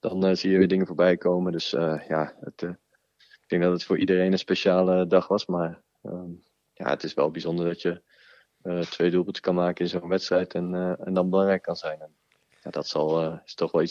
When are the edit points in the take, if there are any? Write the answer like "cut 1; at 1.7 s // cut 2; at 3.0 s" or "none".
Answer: none